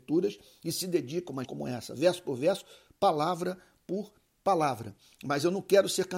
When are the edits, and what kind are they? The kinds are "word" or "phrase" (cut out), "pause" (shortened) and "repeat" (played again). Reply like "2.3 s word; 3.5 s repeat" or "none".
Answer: 1.4 s word